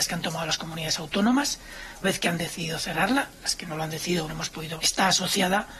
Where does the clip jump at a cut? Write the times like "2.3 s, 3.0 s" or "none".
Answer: 2.0 s, 4.3 s, 4.8 s